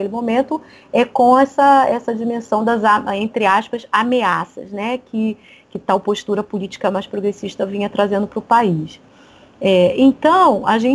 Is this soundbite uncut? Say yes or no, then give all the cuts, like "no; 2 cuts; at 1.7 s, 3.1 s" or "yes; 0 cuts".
yes; 0 cuts